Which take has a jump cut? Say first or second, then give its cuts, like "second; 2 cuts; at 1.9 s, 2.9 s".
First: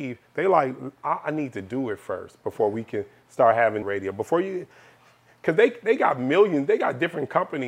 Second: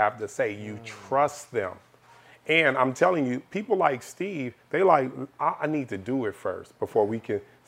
first; 1 cut; at 3.8 s